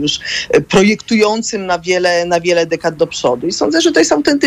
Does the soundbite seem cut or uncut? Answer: uncut